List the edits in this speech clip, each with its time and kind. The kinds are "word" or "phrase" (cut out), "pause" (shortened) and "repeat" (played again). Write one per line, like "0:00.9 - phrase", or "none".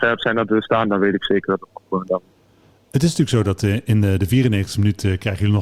none